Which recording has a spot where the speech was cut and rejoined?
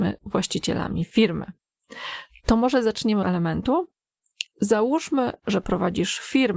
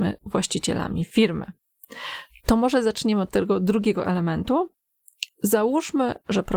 first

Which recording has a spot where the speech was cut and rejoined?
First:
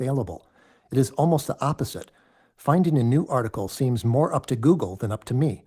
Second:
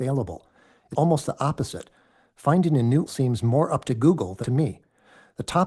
second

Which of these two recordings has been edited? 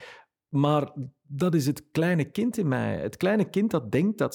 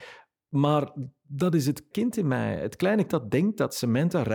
second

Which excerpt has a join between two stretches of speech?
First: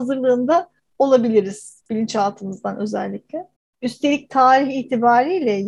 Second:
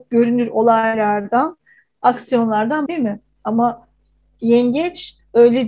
second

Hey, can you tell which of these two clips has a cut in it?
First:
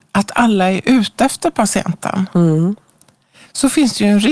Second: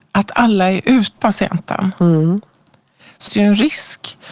second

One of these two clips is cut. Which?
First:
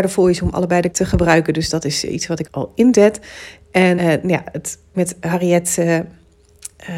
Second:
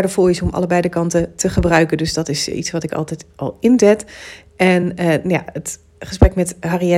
first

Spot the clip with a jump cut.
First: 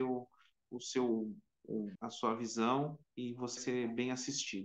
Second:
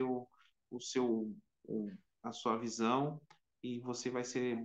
first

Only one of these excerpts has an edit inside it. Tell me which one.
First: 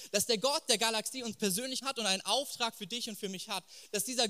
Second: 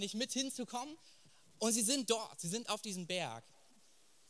first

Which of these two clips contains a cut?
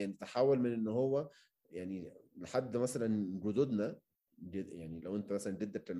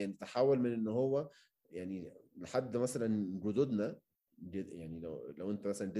first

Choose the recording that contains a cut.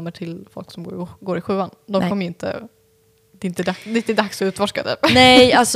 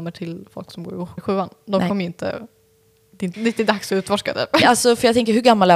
second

